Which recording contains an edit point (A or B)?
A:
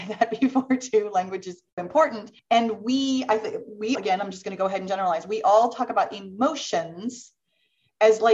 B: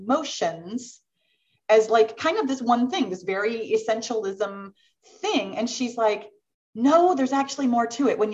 A